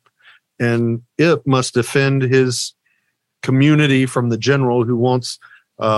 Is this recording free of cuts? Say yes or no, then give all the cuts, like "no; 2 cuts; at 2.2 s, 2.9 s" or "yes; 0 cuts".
yes; 0 cuts